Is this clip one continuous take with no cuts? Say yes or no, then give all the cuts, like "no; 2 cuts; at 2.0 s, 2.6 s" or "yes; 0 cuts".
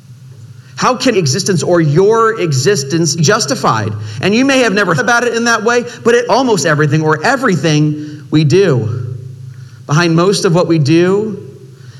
no; 4 cuts; at 1.1 s, 3.2 s, 5.0 s, 6.3 s